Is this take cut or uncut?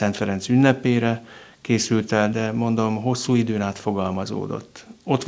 cut